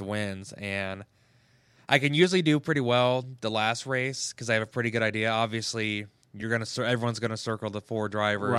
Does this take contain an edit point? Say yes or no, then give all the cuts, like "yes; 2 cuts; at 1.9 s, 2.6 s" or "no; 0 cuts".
no; 0 cuts